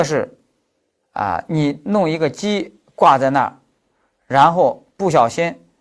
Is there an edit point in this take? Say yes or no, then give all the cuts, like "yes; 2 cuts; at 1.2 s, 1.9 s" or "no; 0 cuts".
no; 0 cuts